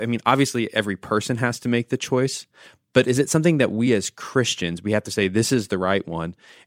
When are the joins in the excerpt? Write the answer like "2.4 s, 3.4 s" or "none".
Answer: none